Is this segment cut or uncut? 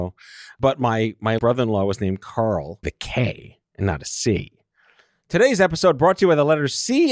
cut